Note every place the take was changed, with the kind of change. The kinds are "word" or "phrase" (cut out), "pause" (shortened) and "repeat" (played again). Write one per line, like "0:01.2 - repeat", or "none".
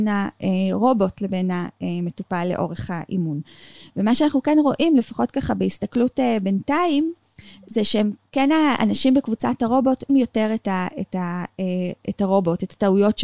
0:10.1 - word